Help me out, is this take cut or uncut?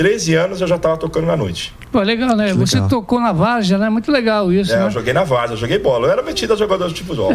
uncut